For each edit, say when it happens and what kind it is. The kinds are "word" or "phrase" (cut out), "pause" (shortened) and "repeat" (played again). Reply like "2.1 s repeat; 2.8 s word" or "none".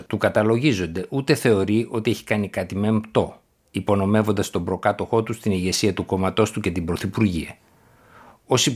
none

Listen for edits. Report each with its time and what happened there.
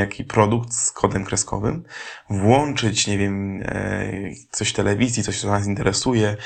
none

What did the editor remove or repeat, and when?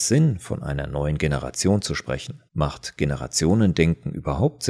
2.5 s pause

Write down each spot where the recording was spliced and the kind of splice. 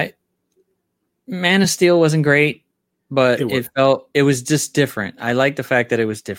none

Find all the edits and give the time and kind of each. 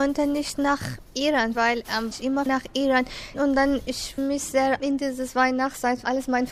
1.5 s word; 2.1 s word; 2.5 s word; 4.2 s word; 4.8 s word

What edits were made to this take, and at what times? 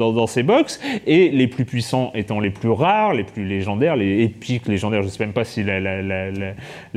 none

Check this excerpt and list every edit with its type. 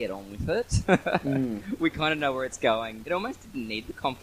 3.0 s word

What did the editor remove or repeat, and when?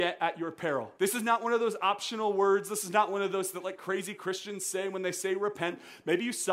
0.9 s pause; 3.5 s word

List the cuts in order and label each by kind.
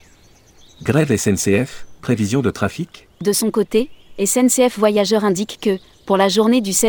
2.0 s word; 3.1 s pause

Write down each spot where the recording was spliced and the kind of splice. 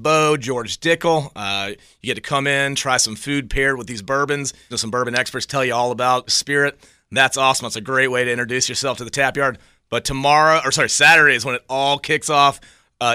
4.7 s word; 6.3 s word

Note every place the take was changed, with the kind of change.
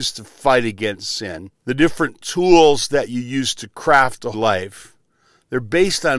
1.5 s pause; 4.3 s word

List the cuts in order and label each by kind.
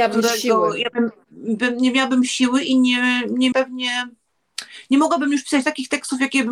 3.5 s word

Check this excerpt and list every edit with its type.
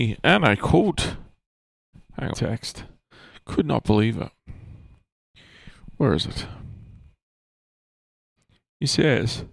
2.3 s phrase

